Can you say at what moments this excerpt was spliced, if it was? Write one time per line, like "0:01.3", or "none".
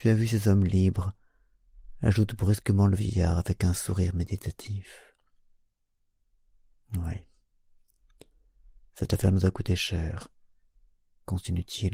none